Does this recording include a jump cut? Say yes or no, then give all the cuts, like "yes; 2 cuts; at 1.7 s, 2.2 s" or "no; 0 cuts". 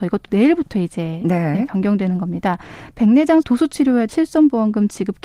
yes; 2 cuts; at 3.4 s, 4.1 s